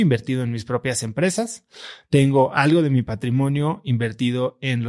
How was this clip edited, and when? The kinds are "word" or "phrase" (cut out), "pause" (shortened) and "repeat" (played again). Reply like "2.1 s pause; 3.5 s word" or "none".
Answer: none

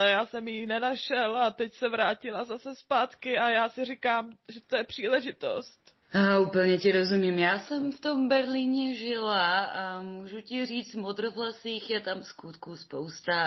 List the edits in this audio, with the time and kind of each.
6.0 s pause

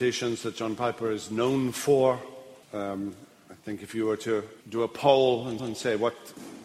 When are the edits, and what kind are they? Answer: 2.6 s pause; 3.6 s pause; 4.6 s pause; 5.6 s repeat

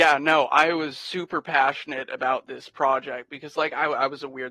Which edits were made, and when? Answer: none

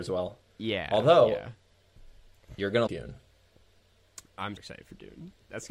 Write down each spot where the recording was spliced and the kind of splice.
2.9 s word; 4.6 s word

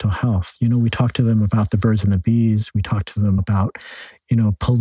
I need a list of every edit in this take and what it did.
3.4 s word

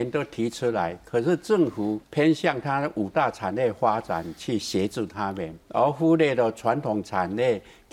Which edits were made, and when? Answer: 2.0 s pause; 5.6 s pause

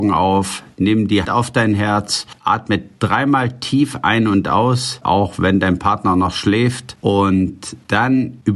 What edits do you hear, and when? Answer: 1.2 s word

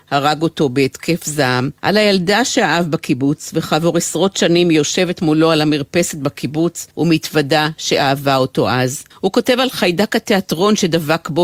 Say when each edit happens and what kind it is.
1.8 s pause; 6.9 s pause; 9.1 s pause

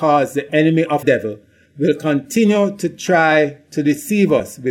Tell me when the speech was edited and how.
1.0 s phrase

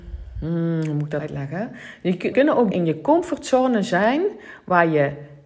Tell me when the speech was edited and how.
1.2 s word; 2.3 s word; 2.7 s word

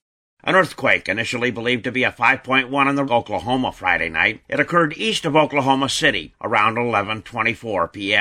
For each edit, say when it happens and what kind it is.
3.1 s phrase

